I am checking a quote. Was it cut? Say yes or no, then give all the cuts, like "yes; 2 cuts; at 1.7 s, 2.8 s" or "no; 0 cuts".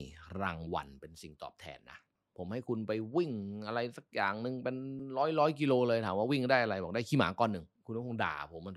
no; 0 cuts